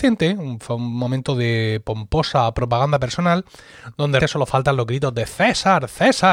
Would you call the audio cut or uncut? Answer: cut